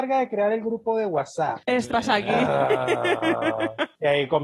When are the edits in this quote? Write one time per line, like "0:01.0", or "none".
0:01.9